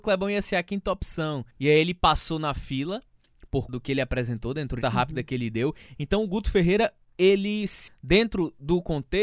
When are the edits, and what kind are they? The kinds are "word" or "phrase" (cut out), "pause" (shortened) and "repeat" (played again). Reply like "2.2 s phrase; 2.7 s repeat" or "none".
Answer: 1.5 s pause; 3.7 s word; 4.8 s phrase; 7.9 s word